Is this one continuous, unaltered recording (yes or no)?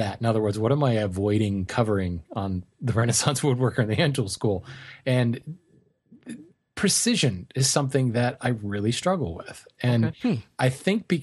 yes